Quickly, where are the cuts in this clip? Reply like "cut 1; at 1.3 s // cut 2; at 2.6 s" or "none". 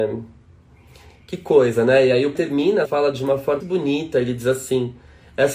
cut 1; at 2.3 s // cut 2; at 2.8 s // cut 3; at 3.6 s